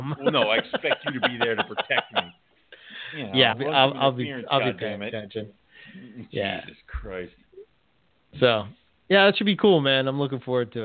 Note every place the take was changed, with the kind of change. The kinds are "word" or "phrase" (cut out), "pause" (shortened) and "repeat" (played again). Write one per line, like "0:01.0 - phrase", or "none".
0:03.5 - word